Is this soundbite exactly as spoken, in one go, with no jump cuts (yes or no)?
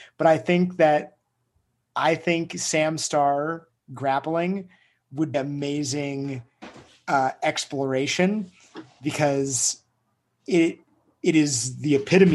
no